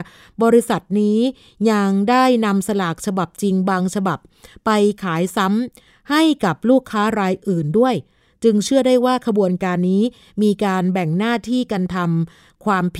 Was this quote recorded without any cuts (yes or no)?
yes